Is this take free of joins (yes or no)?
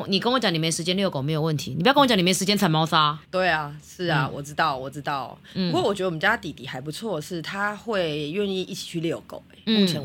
no